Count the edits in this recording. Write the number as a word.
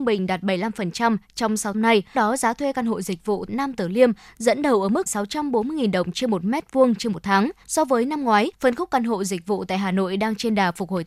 six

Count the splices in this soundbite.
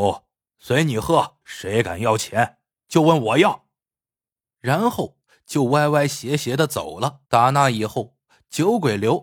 three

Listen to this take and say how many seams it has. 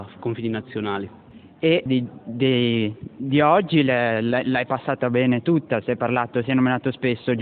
one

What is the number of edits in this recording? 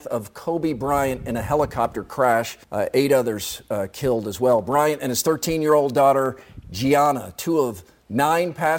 one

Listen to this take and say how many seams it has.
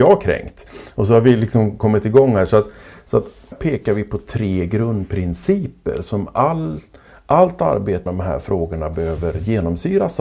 two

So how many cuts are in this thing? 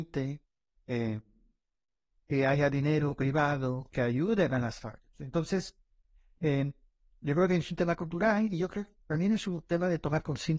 zero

